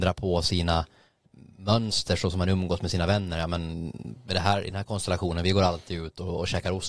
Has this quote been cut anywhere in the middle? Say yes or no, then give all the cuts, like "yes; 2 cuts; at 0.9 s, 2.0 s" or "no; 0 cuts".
no; 0 cuts